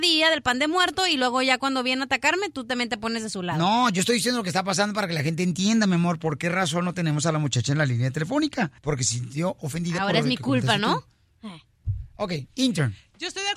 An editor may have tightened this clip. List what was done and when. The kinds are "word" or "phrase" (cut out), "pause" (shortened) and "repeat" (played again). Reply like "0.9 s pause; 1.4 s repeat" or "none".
8.8 s pause

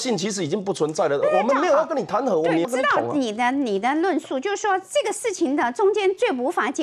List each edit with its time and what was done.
2.6 s word

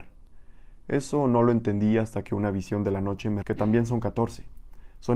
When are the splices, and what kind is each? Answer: 3.4 s word

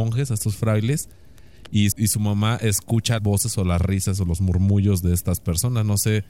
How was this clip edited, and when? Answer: 1.9 s word; 3.2 s word

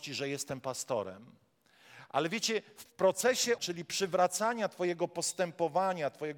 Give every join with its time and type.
2.8 s word; 3.6 s word

